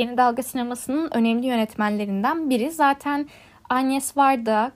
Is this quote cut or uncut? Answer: uncut